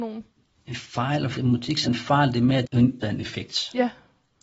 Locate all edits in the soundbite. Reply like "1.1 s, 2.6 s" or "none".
1.3 s, 1.8 s, 2.6 s, 3.0 s